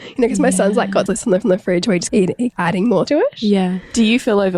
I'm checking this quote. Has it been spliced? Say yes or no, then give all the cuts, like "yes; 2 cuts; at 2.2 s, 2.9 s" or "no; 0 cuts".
yes; 5 cuts; at 1.1 s, 1.4 s, 2.1 s, 2.5 s, 3.1 s